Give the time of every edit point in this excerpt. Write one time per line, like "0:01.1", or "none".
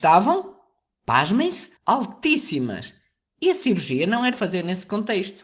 0:01.8
0:04.3